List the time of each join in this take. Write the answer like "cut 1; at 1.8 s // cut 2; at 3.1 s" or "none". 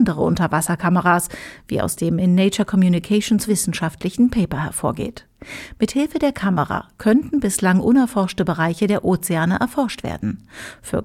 cut 1; at 3.5 s

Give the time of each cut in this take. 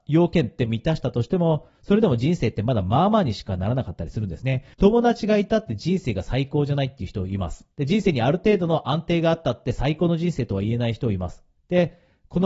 cut 1; at 4.7 s // cut 2; at 7.7 s // cut 3; at 11.6 s

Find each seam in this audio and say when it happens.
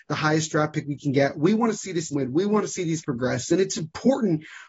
cut 1; at 2.1 s // cut 2; at 3.0 s

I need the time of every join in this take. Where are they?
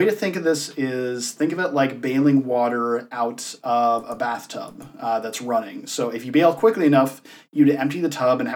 none

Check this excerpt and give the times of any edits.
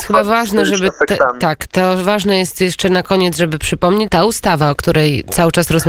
cut 1; at 4.1 s

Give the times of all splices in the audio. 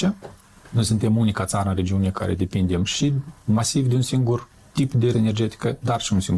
cut 1; at 5.1 s

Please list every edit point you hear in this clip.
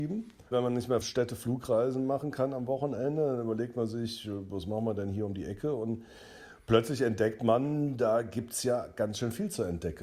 cut 1; at 1.0 s

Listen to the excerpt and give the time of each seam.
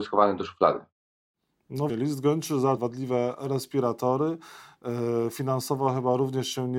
cut 1; at 1.9 s // cut 2; at 2.8 s

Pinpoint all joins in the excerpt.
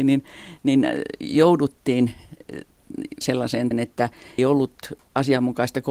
cut 1; at 3.2 s // cut 2; at 3.7 s // cut 3; at 4.4 s

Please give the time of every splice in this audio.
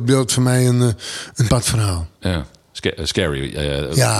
cut 1; at 1.5 s

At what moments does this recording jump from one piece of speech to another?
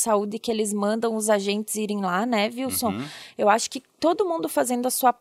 none

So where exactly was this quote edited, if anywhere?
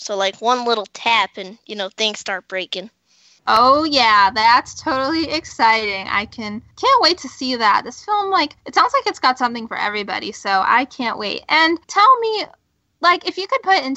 cut 1; at 6.7 s // cut 2; at 8.6 s // cut 3; at 11.8 s

